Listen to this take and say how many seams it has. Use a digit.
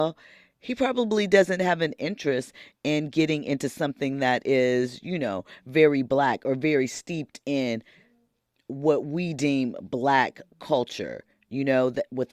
0